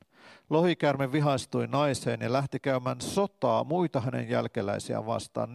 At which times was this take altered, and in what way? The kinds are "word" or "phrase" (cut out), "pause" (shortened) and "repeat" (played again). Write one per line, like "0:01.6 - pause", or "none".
none